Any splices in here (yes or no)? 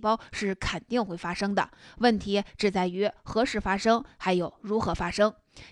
no